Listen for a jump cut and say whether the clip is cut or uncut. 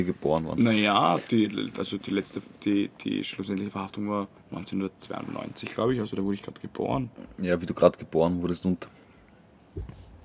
cut